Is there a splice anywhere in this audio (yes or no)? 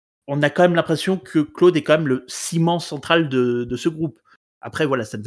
no